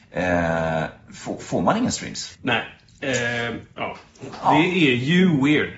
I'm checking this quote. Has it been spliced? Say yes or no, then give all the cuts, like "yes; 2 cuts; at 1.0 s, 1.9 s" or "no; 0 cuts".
yes; 1 cut; at 2.3 s